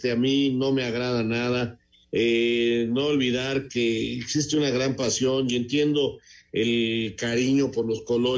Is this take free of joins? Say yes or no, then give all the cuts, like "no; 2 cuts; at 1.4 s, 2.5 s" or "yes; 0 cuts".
yes; 0 cuts